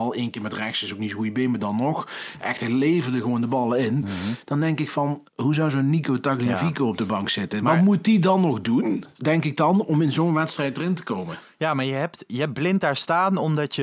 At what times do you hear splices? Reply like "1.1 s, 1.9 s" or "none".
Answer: 5.3 s